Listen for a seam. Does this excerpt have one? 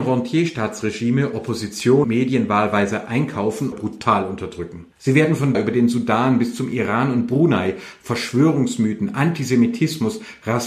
yes; 4 cuts; at 2.0 s, 3.7 s, 4.9 s, 5.5 s

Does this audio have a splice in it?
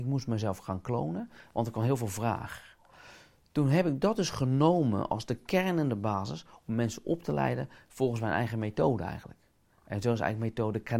no; 0 cuts

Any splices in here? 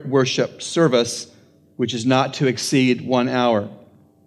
no; 0 cuts

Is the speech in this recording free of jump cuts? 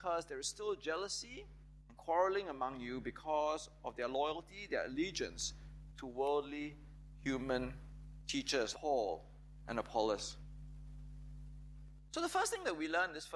no; 1 cut; at 8.7 s

